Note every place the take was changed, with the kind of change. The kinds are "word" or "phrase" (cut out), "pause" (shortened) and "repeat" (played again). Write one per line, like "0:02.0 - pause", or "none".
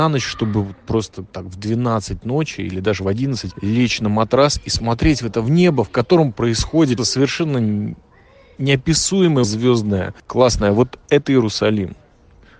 0:01.3 - word
0:03.5 - word
0:07.0 - word
0:09.4 - word